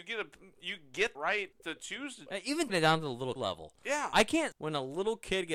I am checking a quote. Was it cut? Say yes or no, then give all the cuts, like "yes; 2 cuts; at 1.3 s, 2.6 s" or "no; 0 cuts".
yes; 6 cuts; at 1.1 s, 1.5 s, 2.3 s, 2.7 s, 3.4 s, 4.5 s